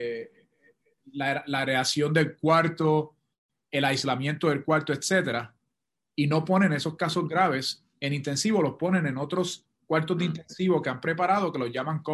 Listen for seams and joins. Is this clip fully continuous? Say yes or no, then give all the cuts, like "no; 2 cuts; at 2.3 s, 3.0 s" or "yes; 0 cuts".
yes; 0 cuts